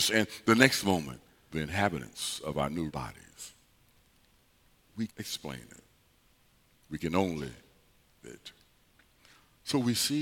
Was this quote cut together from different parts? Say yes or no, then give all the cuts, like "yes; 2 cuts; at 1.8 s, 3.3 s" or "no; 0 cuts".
yes; 4 cuts; at 1.5 s, 2.9 s, 5.1 s, 8.2 s